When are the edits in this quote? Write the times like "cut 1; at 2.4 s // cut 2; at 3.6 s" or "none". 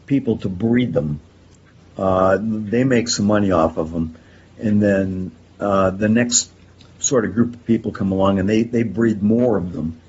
none